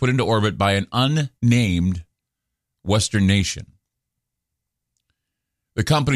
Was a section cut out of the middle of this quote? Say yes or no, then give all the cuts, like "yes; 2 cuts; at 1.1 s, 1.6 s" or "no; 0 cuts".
yes; 1 cut; at 1.4 s